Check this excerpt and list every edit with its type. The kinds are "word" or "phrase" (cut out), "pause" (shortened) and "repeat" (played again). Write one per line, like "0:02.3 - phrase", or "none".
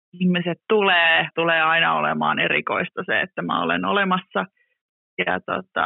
0:01.3 - phrase